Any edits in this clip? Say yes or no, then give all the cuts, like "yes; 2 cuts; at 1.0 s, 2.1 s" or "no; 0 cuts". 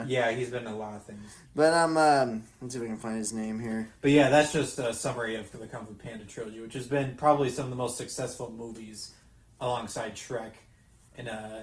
no; 0 cuts